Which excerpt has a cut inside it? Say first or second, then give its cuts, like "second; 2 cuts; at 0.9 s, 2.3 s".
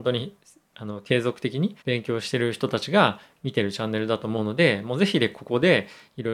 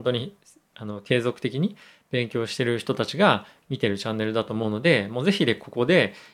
first; 1 cut; at 1.8 s